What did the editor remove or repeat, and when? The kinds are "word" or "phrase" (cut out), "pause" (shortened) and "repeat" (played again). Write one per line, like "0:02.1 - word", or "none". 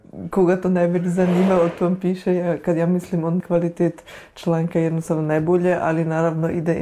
0:03.4 - word